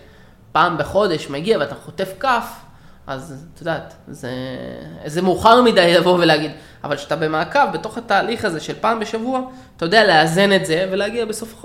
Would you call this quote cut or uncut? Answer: uncut